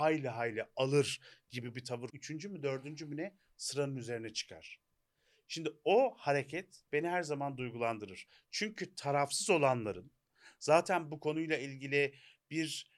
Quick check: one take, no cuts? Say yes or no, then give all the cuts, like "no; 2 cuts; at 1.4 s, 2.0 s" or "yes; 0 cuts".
no; 1 cut; at 2.1 s